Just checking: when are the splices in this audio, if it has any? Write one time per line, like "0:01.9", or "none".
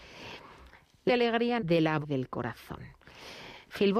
0:01.1
0:01.6
0:02.0